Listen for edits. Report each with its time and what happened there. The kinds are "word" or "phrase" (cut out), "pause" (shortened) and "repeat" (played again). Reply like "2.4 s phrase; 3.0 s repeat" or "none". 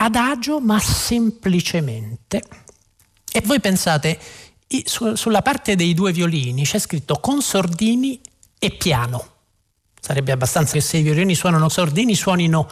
3.4 s word; 10.7 s word; 11.7 s word